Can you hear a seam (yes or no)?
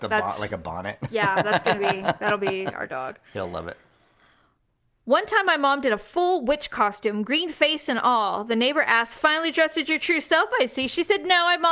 no